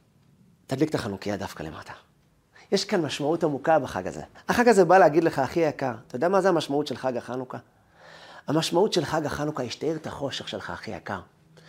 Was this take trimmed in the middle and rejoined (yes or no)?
yes